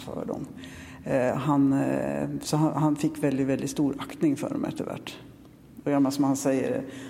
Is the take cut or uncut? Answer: uncut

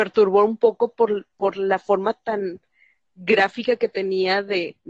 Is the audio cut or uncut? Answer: uncut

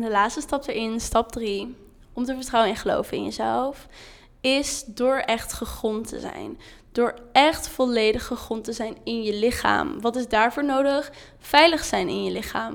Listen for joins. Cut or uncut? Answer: uncut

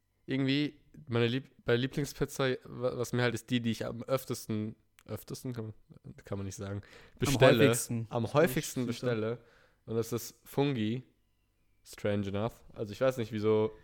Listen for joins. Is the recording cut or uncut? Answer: cut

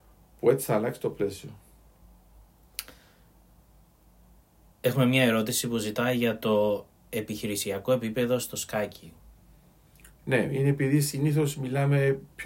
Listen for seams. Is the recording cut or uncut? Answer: uncut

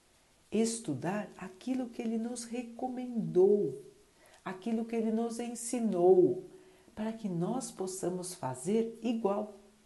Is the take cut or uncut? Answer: uncut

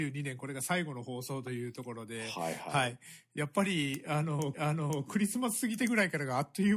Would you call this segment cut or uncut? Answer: cut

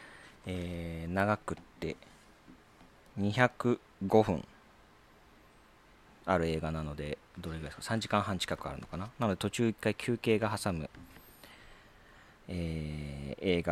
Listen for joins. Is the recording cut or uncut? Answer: uncut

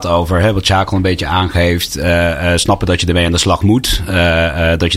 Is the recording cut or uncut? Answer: uncut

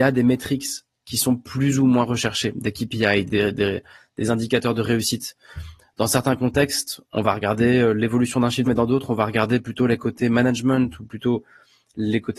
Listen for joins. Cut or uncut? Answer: cut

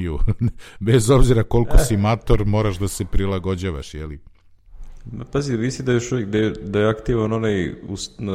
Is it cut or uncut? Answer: uncut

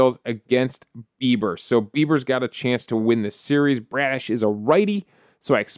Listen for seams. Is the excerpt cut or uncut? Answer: uncut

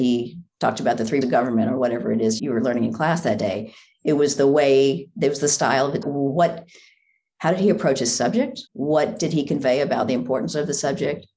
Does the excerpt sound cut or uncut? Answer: cut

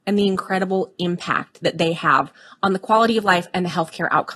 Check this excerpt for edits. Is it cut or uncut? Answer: uncut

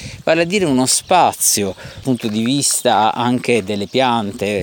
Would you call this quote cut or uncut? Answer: cut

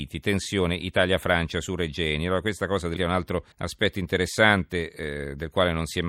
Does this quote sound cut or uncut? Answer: cut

